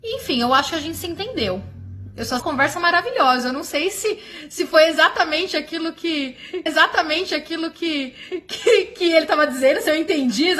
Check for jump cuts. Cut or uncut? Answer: cut